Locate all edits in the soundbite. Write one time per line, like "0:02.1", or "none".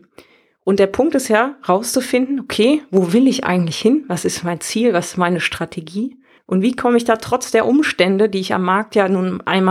0:06.4